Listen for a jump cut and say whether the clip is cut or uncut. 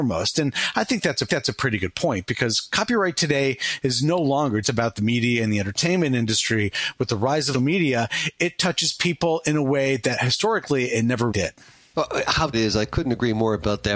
cut